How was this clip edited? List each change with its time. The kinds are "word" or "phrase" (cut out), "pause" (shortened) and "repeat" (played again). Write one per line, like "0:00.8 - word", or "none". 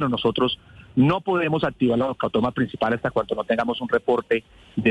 none